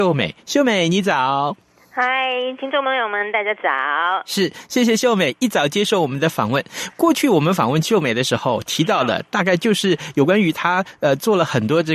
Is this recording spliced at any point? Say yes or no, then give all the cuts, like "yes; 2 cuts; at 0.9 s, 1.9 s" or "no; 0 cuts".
yes; 1 cut; at 2.6 s